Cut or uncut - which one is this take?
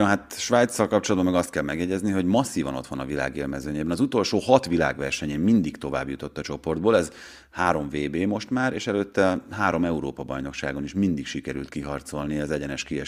uncut